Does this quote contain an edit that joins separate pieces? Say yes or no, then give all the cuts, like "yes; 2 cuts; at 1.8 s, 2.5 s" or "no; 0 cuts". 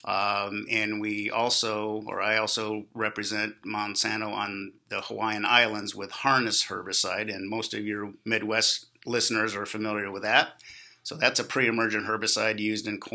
no; 0 cuts